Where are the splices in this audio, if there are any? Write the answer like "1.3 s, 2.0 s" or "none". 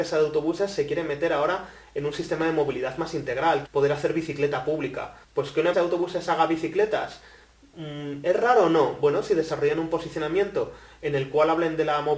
3.6 s, 5.2 s, 5.7 s